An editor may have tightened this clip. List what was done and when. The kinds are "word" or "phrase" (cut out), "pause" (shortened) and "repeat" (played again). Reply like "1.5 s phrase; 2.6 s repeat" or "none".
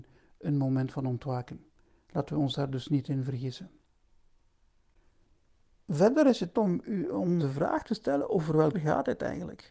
6.5 s word; 7.4 s word; 8.7 s word